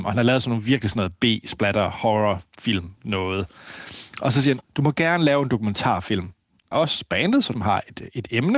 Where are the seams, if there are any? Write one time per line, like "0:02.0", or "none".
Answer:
0:04.6
0:06.7
0:07.5